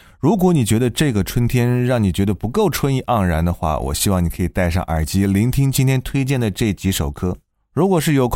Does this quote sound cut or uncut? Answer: uncut